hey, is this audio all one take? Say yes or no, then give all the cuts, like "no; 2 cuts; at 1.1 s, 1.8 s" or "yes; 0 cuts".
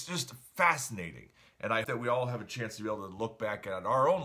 no; 1 cut; at 1.8 s